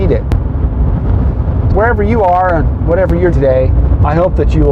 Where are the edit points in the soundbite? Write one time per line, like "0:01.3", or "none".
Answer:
0:01.7
0:03.3